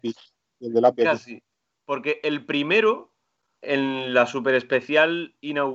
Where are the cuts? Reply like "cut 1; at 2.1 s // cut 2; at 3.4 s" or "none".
cut 1; at 3.6 s